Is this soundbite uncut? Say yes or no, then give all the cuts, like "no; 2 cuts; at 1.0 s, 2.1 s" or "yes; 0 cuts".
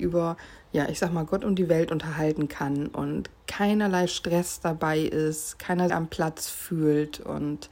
no; 1 cut; at 5.9 s